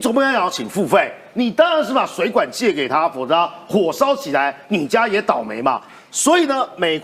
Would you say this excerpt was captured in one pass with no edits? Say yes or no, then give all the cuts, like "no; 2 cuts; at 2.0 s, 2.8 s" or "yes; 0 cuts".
yes; 0 cuts